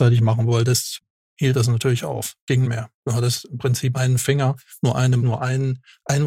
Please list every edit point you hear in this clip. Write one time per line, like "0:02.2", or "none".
0:02.6
0:03.9
0:05.2